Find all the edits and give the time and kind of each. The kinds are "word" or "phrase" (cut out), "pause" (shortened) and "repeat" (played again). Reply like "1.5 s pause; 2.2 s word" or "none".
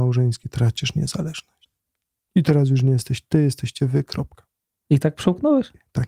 none